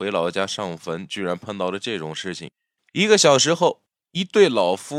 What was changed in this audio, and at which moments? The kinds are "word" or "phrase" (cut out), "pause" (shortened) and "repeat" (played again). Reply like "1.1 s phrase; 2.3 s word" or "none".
none